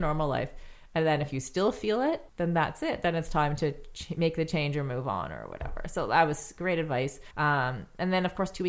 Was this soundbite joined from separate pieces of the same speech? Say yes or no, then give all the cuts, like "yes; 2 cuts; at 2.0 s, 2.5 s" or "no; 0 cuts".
yes; 2 cuts; at 2.3 s, 7.3 s